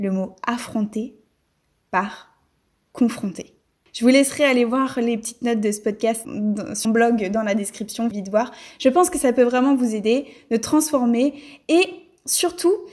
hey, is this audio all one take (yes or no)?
no